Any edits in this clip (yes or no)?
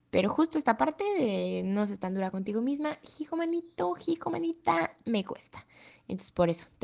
no